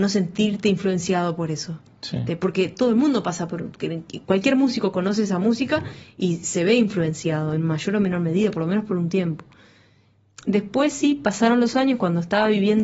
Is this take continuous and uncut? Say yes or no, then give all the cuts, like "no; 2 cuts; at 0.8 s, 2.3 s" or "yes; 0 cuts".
yes; 0 cuts